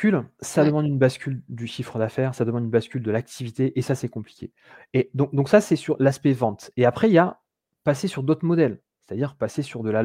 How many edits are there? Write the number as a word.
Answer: zero